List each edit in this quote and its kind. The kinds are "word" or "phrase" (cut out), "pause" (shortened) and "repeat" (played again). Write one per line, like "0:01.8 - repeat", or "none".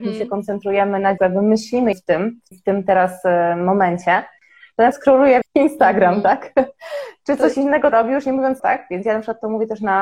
0:01.2 - word
0:01.9 - word
0:02.5 - word
0:04.9 - word
0:05.4 - word
0:07.9 - word
0:08.6 - word